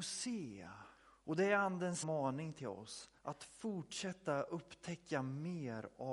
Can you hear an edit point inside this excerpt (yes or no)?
yes